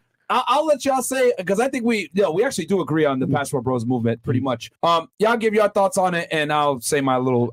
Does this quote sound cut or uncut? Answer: cut